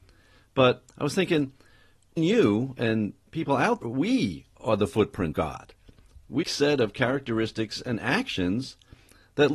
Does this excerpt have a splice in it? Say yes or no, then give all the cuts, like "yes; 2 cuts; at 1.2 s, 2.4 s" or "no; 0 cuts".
yes; 4 cuts; at 2.2 s, 3.8 s, 5.3 s, 6.4 s